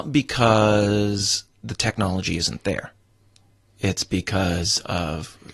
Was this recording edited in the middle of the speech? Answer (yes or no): no